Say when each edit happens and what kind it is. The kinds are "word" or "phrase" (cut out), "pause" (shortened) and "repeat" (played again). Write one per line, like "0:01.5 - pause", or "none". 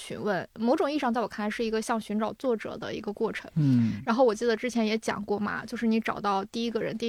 none